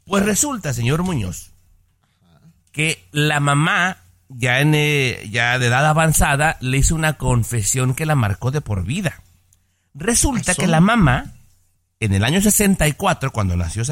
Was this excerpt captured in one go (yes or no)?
yes